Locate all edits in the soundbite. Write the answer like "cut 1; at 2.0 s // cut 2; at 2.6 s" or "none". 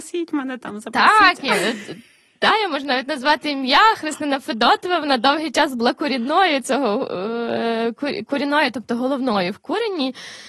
none